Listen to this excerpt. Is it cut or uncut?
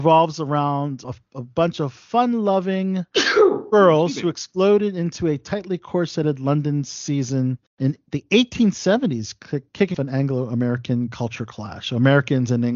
cut